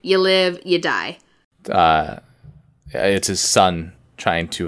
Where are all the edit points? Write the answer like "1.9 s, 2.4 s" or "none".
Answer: none